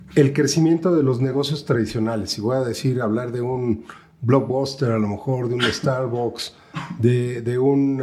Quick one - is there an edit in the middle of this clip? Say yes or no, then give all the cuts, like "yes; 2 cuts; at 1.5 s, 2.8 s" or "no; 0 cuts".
no; 0 cuts